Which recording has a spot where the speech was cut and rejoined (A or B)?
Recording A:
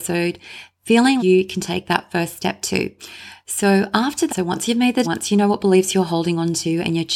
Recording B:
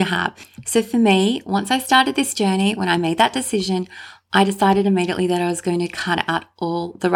A